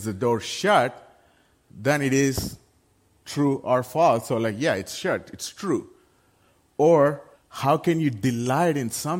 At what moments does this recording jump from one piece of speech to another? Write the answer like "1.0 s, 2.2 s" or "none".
7.3 s